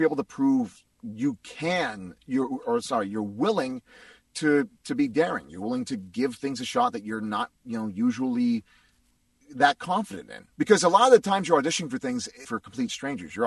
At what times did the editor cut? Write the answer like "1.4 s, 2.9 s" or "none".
2.6 s, 7.5 s, 10.5 s, 12.4 s